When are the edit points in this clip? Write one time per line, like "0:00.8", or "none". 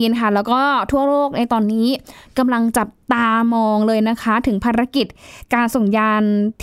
none